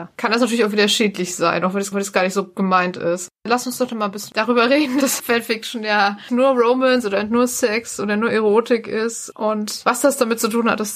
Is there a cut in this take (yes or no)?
yes